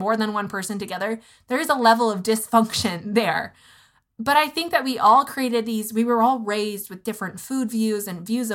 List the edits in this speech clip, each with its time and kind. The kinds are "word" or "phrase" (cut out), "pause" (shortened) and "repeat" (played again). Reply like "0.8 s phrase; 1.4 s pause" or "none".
none